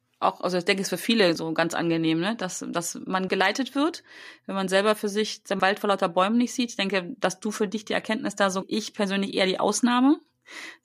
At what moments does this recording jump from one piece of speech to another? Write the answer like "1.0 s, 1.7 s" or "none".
1.4 s, 3.3 s, 5.6 s, 8.6 s